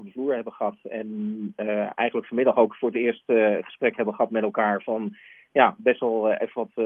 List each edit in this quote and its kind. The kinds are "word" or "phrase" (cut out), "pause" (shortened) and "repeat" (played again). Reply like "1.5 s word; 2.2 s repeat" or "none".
none

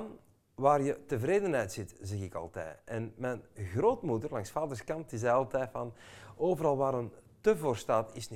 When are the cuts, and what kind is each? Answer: none

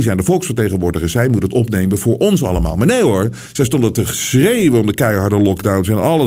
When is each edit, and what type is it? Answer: none

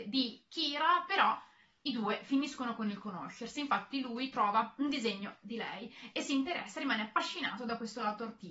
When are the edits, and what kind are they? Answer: none

